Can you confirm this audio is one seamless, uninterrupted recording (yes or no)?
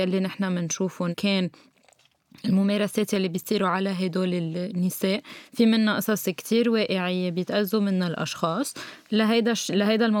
no